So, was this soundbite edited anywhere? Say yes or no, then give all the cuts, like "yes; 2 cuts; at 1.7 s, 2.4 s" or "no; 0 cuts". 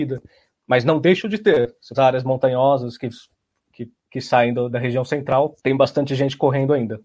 yes; 4 cuts; at 1.9 s, 4.0 s, 4.7 s, 5.6 s